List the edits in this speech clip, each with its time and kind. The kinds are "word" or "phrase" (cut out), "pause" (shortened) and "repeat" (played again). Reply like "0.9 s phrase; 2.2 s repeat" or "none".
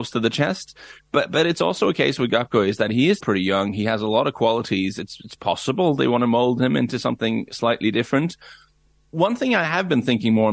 3.2 s word